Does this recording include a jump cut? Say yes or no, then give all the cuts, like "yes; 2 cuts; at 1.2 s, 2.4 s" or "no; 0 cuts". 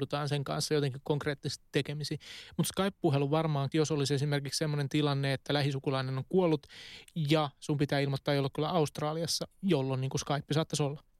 yes; 1 cut; at 3.7 s